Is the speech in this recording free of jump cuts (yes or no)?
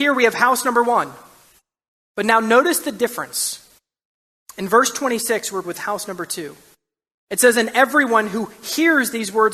no